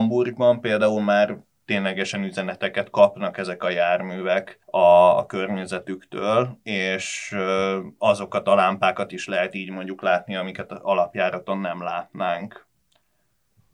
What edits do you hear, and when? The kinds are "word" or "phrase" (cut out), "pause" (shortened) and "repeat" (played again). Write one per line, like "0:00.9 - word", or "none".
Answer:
0:04.6 - pause